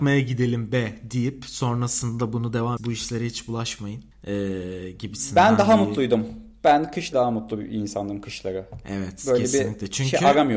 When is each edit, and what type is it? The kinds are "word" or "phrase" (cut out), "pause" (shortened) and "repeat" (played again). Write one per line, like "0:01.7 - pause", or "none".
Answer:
0:02.8 - word
0:04.1 - pause
0:07.1 - phrase